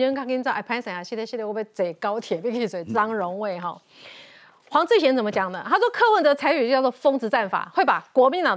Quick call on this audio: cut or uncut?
uncut